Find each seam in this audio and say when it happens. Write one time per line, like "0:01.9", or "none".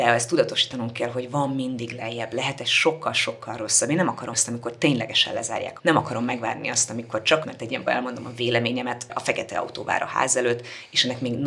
0:04.3
0:05.8
0:07.4
0:07.9